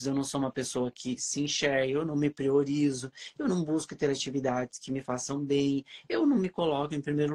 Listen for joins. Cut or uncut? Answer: uncut